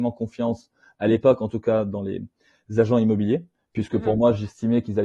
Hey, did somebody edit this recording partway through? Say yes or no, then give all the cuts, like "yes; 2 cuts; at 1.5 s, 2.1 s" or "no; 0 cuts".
no; 0 cuts